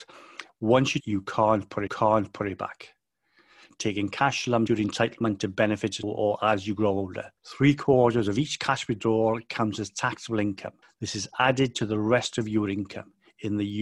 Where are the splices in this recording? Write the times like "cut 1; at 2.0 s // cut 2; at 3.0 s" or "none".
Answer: cut 1; at 1.0 s // cut 2; at 1.9 s // cut 3; at 4.7 s // cut 4; at 6.0 s // cut 5; at 7.4 s // cut 6; at 10.8 s